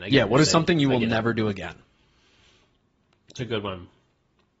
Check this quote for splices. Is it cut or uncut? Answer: uncut